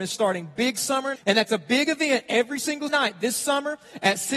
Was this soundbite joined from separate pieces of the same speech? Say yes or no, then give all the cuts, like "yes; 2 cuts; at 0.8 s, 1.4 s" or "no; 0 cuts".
yes; 2 cuts; at 1.2 s, 2.9 s